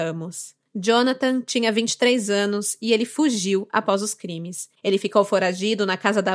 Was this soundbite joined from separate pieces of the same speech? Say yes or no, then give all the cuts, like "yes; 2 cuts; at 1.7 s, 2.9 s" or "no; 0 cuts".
no; 0 cuts